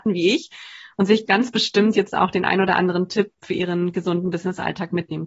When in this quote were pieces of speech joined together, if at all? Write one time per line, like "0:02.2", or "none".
0:01.3